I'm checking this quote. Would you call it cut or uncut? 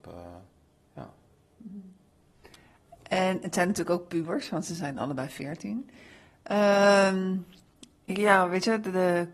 uncut